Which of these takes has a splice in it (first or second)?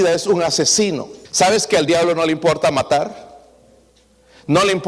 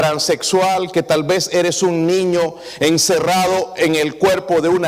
first